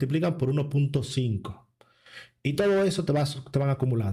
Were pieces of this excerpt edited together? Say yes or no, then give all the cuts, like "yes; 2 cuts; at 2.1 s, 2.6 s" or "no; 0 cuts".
no; 0 cuts